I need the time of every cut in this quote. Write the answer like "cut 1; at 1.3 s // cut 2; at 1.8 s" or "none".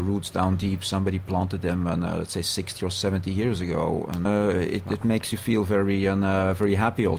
cut 1; at 4.3 s

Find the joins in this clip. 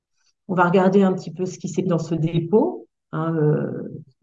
cut 1; at 1.9 s

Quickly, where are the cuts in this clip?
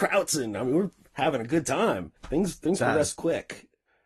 cut 1; at 2.2 s

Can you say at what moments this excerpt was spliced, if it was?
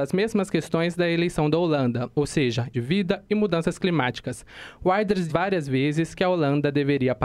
cut 1; at 2.7 s // cut 2; at 5.3 s

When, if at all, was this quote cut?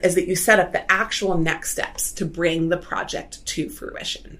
none

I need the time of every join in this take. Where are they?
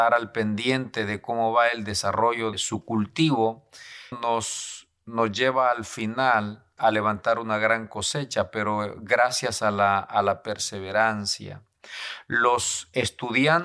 cut 1; at 2.5 s // cut 2; at 4.1 s // cut 3; at 6.8 s

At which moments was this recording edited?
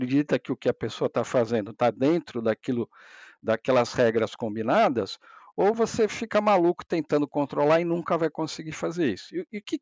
none

